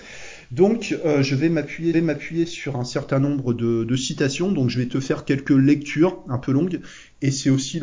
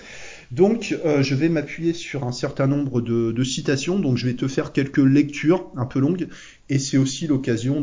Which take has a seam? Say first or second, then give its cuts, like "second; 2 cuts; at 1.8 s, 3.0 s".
first; 1 cut; at 1.9 s